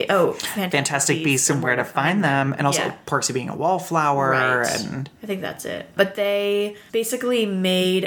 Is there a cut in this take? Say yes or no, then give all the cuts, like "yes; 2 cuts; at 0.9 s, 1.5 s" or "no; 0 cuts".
no; 0 cuts